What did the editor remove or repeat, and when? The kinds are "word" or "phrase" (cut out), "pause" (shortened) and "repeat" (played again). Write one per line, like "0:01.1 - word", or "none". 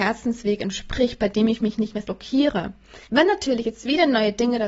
0:02.0 - word
0:03.1 - pause